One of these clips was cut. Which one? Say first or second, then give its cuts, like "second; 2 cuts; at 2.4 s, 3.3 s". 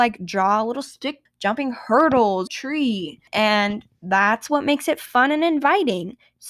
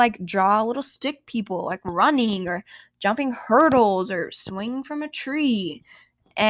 first; 3 cuts; at 1.3 s, 2.5 s, 3.3 s